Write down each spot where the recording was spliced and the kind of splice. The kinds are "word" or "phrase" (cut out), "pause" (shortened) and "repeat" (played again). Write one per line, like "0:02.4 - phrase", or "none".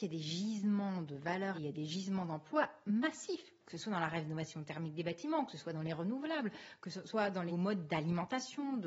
0:01.5 - word
0:07.5 - word